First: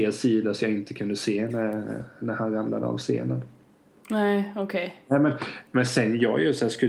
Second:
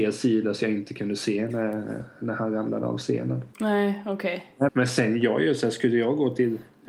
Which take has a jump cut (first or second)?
second